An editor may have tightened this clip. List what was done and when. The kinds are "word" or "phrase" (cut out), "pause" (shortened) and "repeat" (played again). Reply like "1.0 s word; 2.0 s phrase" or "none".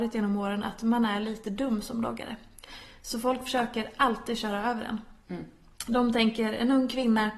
none

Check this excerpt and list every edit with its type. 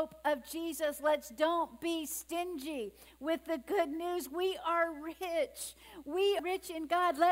6.4 s word

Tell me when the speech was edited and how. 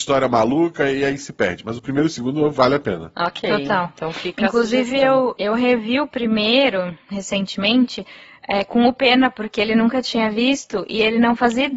none

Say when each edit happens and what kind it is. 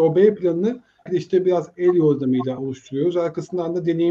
1.1 s word; 2.6 s word

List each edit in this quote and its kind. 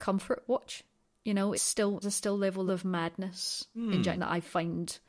1.5 s word; 2.0 s word; 2.7 s phrase; 4.2 s word

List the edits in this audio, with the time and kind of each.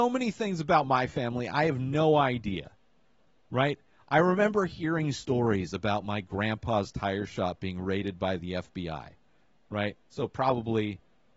none

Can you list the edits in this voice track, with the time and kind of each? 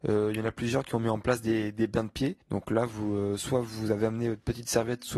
2.4 s pause

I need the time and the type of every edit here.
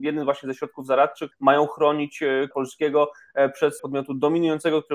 1.3 s word; 2.5 s word; 3.8 s word

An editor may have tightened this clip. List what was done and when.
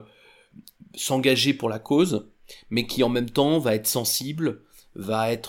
none

